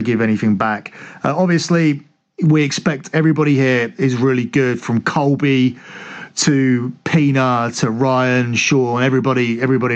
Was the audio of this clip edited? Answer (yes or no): no